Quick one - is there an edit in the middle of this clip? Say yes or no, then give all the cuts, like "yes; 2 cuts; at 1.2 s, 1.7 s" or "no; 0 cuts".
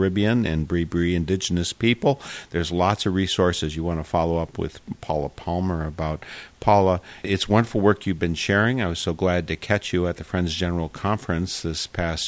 no; 0 cuts